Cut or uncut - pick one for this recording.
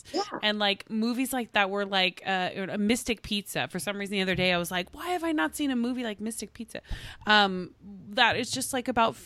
cut